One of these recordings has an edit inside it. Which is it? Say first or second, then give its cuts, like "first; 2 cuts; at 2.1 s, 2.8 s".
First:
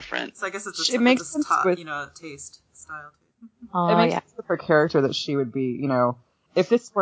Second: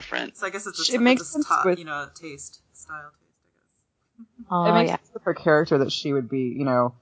first; 1 cut; at 3.3 s